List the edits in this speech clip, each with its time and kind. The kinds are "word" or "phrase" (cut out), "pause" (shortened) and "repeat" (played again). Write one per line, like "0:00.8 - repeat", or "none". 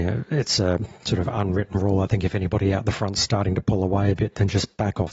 none